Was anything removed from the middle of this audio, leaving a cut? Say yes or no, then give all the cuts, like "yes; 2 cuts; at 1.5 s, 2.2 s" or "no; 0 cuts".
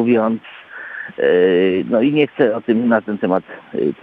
no; 0 cuts